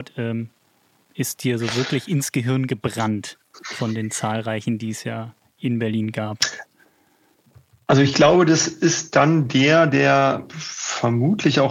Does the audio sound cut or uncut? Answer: uncut